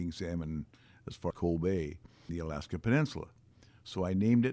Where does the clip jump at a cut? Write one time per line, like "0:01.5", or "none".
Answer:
0:01.3
0:02.3